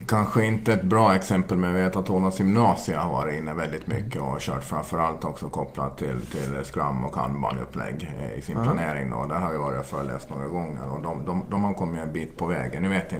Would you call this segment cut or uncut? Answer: uncut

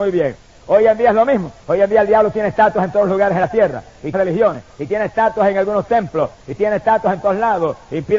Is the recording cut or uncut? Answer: cut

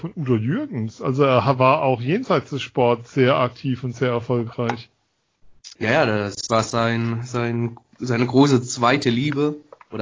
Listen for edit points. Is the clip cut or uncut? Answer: cut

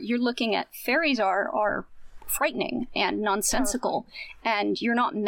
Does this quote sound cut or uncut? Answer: uncut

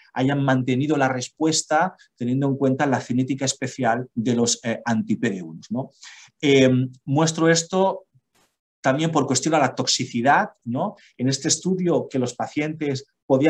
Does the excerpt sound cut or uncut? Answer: cut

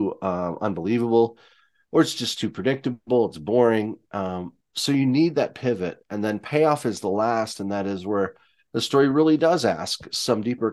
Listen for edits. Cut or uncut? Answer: uncut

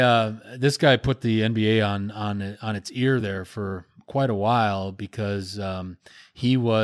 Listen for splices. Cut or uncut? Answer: uncut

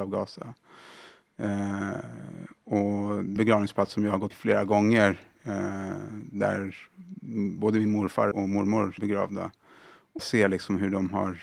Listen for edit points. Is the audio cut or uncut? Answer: cut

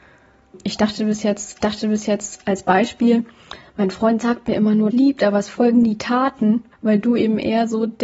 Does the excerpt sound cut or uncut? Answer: cut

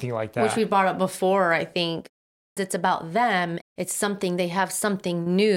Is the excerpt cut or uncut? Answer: cut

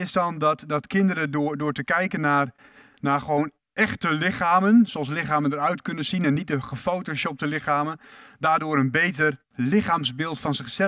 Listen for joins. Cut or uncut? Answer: uncut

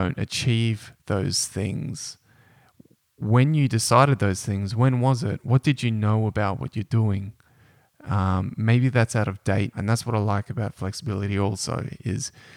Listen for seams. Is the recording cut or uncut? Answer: cut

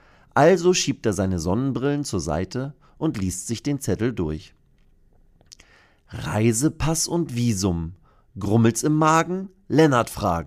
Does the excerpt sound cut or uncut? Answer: uncut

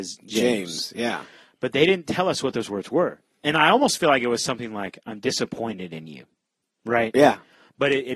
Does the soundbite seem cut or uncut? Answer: uncut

